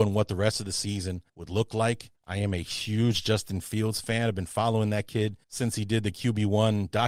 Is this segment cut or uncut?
cut